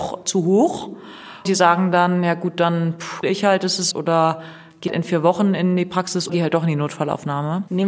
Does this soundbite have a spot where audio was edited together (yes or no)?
yes